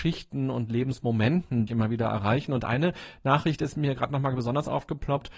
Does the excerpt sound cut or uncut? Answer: cut